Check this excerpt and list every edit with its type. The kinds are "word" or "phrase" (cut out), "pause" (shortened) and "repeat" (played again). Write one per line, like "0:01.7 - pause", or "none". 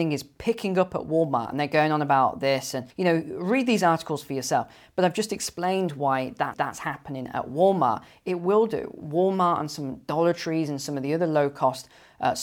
0:02.9 - pause
0:06.5 - repeat